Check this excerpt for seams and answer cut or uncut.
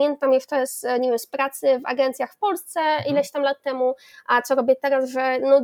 uncut